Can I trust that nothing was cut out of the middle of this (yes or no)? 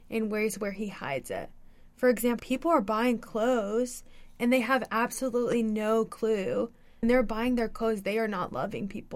no